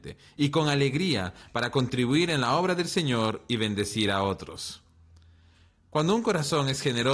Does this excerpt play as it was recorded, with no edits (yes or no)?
yes